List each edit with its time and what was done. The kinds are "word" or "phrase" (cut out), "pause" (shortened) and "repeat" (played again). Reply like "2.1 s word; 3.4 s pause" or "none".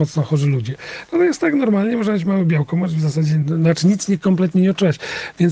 3.4 s word

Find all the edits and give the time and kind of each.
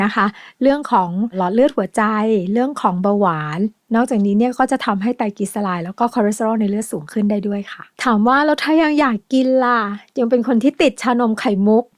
none

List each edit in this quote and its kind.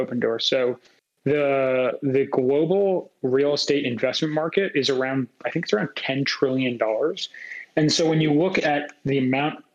none

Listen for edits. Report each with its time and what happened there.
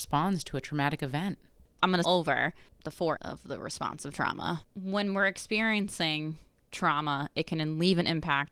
2.0 s word; 3.2 s word

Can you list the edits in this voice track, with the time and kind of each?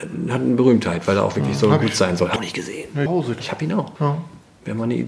2.4 s phrase; 3.1 s phrase; 3.4 s word; 4.0 s pause

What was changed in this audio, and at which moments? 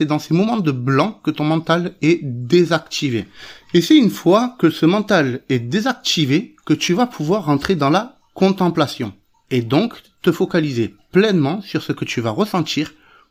none

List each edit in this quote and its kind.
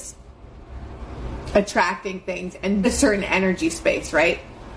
2.8 s phrase

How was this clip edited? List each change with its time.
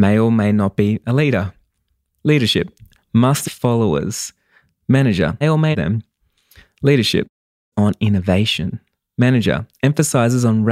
3.4 s word; 5.4 s word; 5.7 s phrase; 7.7 s word

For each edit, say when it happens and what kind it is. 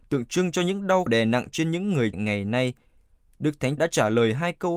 1.1 s word; 2.1 s word; 3.8 s word

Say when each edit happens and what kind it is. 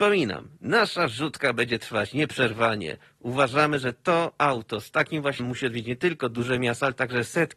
5.4 s word

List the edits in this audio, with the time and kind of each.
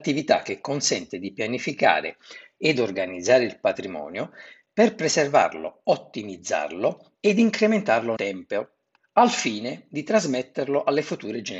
8.2 s word

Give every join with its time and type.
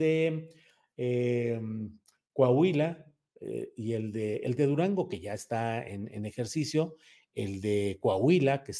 none

